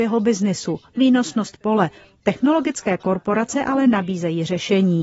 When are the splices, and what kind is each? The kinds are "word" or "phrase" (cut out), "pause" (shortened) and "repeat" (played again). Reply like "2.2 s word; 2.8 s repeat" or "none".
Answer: none